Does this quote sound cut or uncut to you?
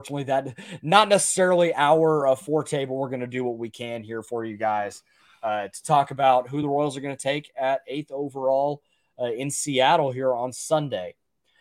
uncut